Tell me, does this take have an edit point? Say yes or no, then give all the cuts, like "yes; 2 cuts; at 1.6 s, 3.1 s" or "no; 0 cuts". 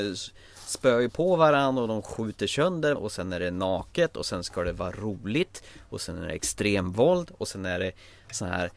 yes; 1 cut; at 2.9 s